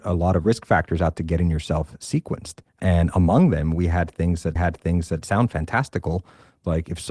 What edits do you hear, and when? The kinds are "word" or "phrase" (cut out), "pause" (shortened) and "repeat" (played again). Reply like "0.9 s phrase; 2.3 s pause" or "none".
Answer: 2.7 s pause; 4.6 s repeat